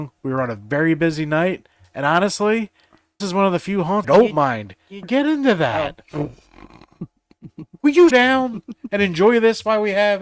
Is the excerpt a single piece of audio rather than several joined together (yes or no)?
no